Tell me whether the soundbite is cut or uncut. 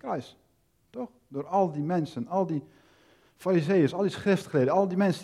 uncut